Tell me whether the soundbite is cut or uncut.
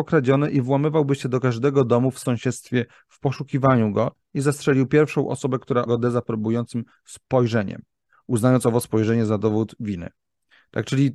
cut